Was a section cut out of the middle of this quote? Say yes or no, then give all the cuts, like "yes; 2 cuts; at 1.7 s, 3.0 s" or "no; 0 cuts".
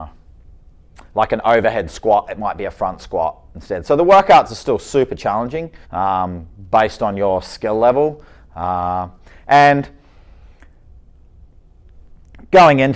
yes; 1 cut; at 5.8 s